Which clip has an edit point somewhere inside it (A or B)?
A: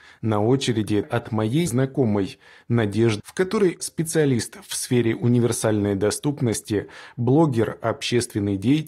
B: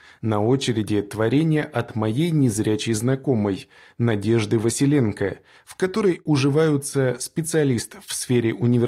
A